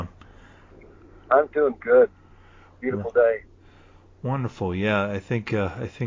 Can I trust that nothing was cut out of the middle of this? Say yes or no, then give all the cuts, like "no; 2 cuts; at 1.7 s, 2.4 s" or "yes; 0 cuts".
yes; 0 cuts